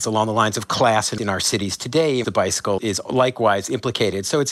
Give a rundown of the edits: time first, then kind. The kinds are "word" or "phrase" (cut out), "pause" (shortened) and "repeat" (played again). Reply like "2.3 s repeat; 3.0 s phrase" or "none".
1.2 s word; 2.2 s word; 2.8 s word